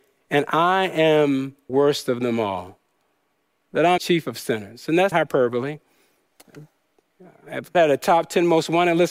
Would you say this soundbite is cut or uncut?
cut